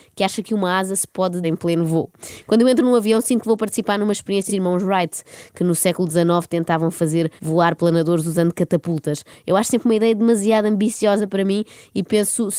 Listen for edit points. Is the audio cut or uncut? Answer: cut